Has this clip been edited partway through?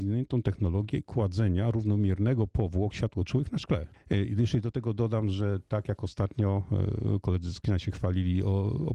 no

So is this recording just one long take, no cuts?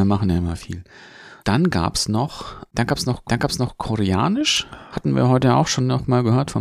no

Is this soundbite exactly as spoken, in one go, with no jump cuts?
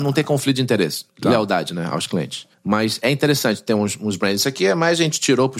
yes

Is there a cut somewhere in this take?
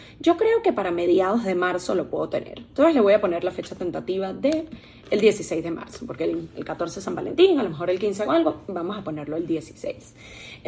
no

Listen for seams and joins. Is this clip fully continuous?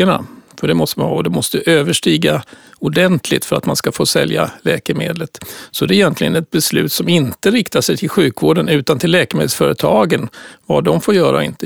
yes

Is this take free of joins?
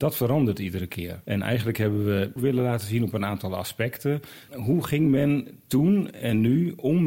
no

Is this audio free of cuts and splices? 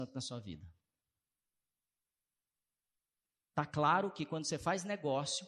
yes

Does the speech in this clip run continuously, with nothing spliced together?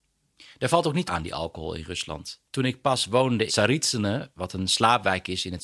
no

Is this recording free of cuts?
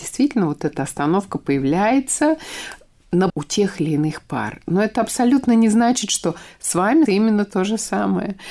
no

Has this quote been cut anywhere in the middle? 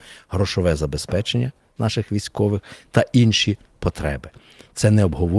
no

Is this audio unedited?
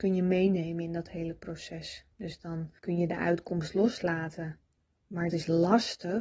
no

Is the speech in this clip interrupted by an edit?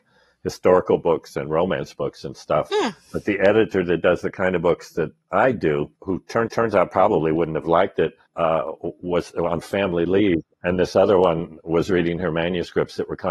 yes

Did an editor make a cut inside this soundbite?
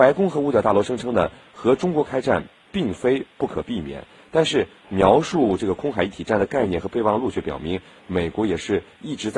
no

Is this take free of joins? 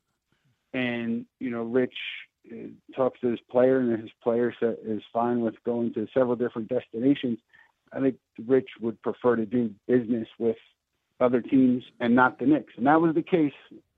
yes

